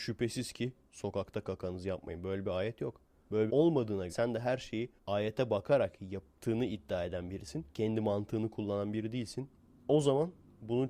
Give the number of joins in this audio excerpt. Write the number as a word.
four